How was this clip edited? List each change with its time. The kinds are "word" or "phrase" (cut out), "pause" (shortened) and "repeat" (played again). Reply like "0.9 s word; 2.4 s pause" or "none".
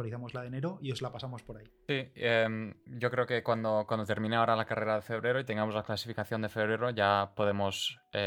none